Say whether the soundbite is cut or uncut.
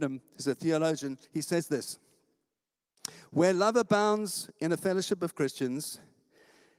cut